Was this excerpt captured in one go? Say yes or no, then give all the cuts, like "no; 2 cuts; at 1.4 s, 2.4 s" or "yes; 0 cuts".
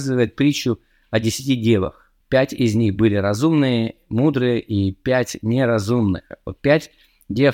no; 1 cut; at 2.2 s